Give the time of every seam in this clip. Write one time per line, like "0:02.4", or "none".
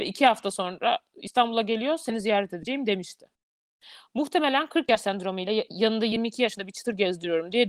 none